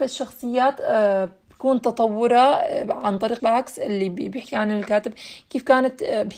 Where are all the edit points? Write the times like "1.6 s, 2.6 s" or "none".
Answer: 3.4 s